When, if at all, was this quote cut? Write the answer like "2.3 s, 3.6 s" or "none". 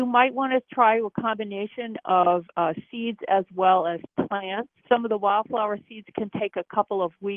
4.8 s